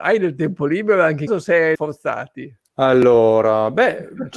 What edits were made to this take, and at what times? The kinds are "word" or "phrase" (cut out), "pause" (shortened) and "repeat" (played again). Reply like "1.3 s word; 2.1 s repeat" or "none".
1.3 s phrase; 1.7 s word; 2.7 s pause

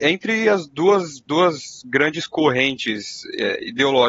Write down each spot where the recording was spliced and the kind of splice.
1.3 s word

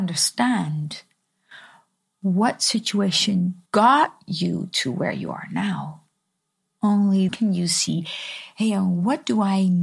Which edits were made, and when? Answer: 3.7 s pause; 7.3 s word

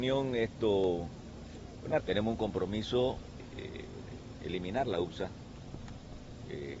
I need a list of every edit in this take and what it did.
2.0 s phrase; 3.4 s word

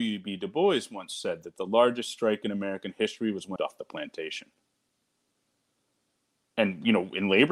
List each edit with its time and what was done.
3.6 s phrase

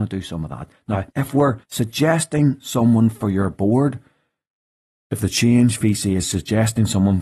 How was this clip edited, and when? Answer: 1.1 s pause; 1.6 s pause

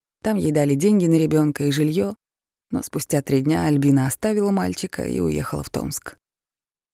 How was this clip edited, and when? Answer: none

